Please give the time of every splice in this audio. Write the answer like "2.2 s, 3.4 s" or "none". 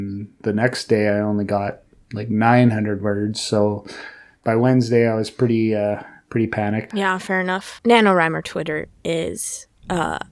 none